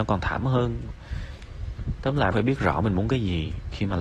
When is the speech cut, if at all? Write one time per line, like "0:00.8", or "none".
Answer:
0:02.3

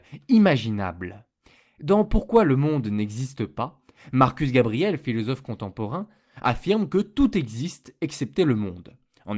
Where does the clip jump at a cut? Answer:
none

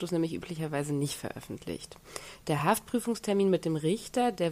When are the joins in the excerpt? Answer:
none

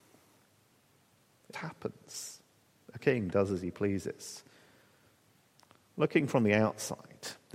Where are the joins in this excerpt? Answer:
0:01.5
0:03.0

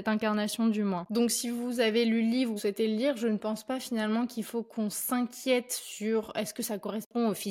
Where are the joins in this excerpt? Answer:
0:02.6

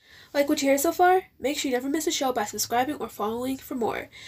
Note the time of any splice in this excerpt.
none

